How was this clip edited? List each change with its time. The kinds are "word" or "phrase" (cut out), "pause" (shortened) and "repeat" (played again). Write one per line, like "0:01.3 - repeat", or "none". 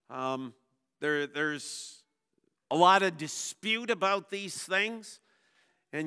none

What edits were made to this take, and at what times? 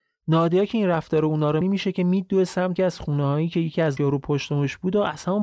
0:01.6 - phrase
0:02.8 - word
0:04.0 - word

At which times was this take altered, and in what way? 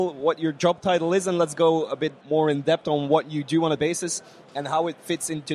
0:02.2 - pause
0:03.8 - word

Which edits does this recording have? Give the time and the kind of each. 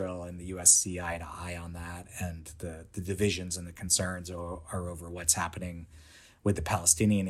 none

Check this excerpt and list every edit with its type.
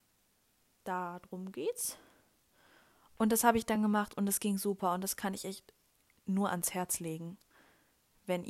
none

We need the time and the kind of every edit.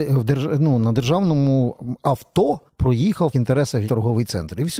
0:02.7 - pause
0:03.3 - word
0:03.9 - word

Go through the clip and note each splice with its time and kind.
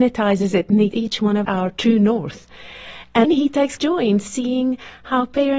0:00.9 - word
0:01.4 - word
0:03.2 - word
0:03.8 - word

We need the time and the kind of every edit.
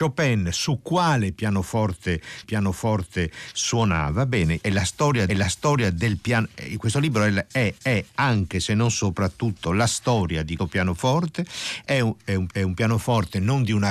0:02.4 - repeat
0:04.6 - word
0:05.3 - repeat
0:07.8 - repeat
0:10.6 - word
0:12.5 - repeat

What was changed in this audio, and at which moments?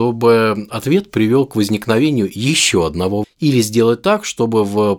0:03.2 - word

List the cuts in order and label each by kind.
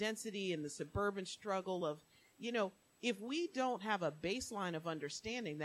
none

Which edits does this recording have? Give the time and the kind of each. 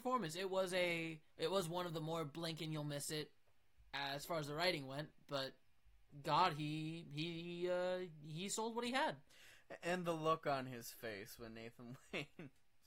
0:01.3 - pause

